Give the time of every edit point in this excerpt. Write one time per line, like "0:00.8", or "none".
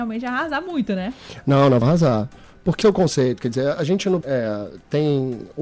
0:01.8
0:02.8
0:03.7
0:04.2